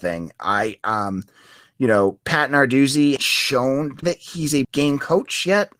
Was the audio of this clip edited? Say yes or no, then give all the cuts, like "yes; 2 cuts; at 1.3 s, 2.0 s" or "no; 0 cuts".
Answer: yes; 3 cuts; at 3.2 s, 4.0 s, 4.6 s